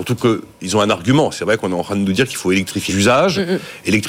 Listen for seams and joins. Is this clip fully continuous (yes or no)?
no